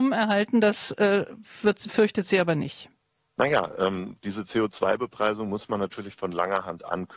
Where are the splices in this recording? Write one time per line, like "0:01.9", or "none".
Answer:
0:03.2